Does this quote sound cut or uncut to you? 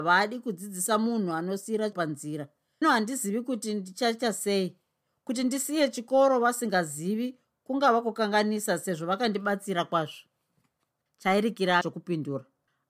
cut